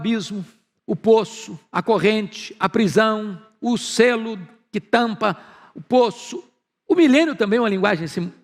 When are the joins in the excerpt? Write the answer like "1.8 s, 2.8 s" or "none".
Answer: none